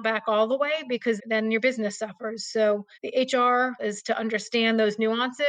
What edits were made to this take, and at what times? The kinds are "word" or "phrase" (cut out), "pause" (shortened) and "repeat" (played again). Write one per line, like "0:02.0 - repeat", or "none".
0:01.2 - word
0:02.9 - pause
0:03.8 - phrase

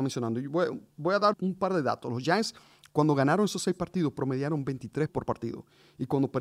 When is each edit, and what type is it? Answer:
0:01.3 - word
0:05.1 - word

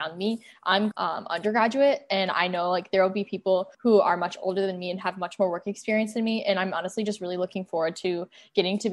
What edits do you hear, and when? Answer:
0:00.9 - phrase
0:03.7 - pause

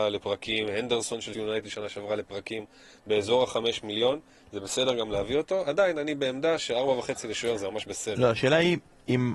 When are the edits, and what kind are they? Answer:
0:01.3 - word

